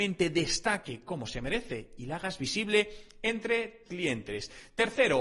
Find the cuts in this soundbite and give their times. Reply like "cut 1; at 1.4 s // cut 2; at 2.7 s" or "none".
cut 1; at 3.9 s